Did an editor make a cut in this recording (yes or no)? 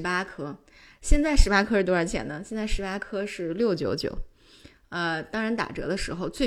no